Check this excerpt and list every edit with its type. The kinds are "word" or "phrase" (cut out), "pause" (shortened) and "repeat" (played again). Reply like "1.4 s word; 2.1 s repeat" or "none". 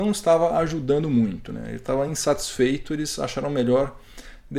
none